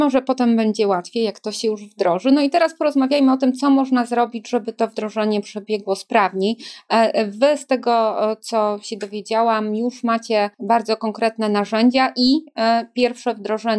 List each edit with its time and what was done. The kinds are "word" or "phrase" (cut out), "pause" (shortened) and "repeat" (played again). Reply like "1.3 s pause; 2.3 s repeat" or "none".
10.5 s pause